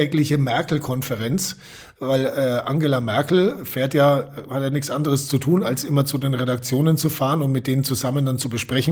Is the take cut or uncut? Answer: uncut